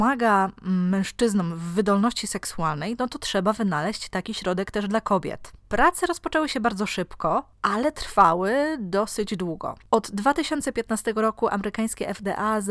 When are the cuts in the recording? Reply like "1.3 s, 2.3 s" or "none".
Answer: 5.6 s, 7.5 s